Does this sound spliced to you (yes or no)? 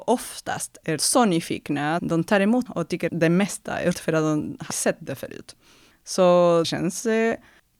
yes